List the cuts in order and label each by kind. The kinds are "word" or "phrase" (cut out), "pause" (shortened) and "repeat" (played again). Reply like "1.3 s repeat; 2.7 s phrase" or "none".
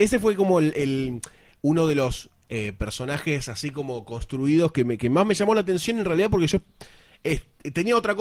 none